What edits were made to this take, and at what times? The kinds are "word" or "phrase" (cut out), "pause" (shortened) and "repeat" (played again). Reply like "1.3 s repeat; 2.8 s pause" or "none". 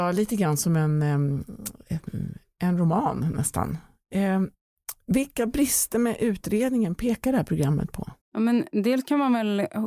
8.2 s pause